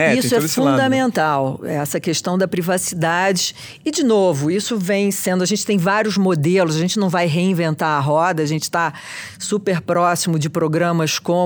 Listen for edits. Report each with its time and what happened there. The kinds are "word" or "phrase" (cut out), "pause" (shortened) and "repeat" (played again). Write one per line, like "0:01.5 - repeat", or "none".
none